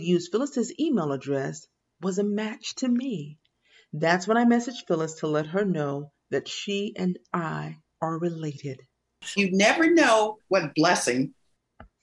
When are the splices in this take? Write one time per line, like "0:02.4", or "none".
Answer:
0:10.4